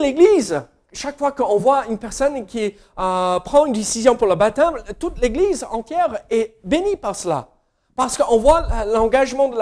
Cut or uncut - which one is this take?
uncut